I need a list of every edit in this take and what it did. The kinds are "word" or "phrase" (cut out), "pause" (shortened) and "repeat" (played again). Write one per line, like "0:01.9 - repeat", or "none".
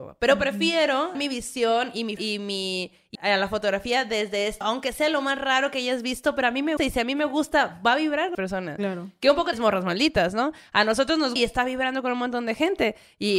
0:01.1 - word
0:02.2 - word
0:03.1 - word
0:04.6 - word
0:06.8 - word
0:08.3 - word
0:09.5 - word
0:11.4 - word